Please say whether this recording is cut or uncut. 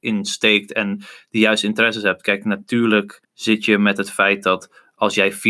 cut